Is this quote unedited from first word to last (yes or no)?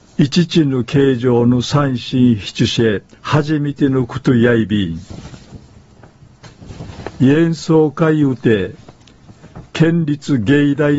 no